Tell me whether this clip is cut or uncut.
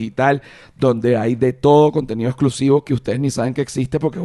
uncut